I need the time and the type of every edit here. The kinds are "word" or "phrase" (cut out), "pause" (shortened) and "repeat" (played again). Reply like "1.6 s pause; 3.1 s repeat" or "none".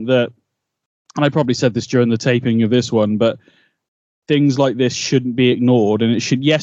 none

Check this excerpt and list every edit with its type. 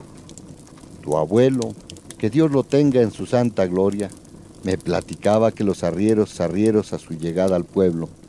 6.3 s repeat

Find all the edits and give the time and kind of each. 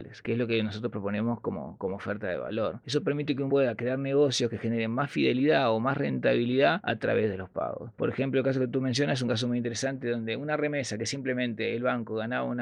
3.5 s word

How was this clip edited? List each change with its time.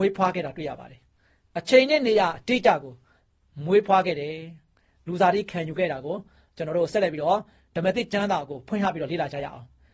none

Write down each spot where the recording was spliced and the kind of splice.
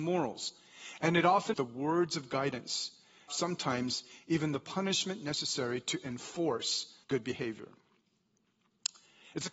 1.5 s word; 3.3 s phrase; 7.0 s pause

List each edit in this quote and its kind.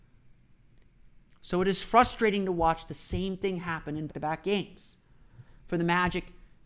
4.1 s word

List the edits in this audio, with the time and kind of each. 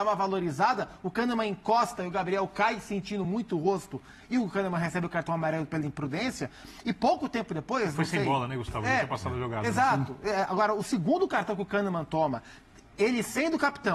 none

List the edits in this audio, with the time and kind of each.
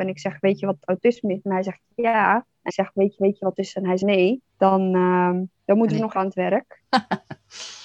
2.7 s word; 3.2 s repeat; 3.6 s word; 4.0 s word; 4.5 s pause; 5.6 s pause; 6.1 s word

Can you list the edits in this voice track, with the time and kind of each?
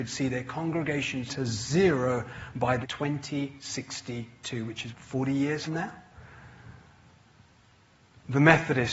1.3 s word; 2.8 s word; 4.9 s word; 5.7 s word

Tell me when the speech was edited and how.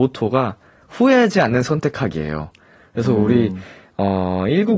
none

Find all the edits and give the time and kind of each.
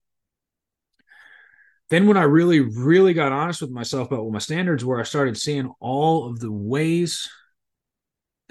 none

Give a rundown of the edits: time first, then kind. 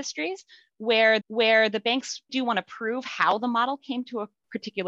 1.2 s repeat; 2.3 s word

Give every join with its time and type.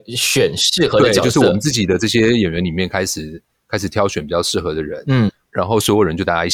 none

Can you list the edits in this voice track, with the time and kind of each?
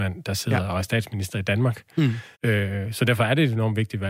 2.3 s pause

